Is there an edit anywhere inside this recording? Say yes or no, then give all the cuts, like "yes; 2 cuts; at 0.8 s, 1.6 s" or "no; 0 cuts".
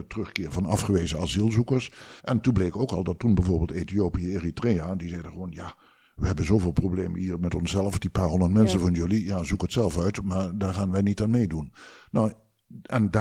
yes; 1 cut; at 2.2 s